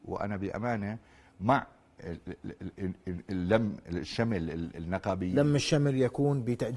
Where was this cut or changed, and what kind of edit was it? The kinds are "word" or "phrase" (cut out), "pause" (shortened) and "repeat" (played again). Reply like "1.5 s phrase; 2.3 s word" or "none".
none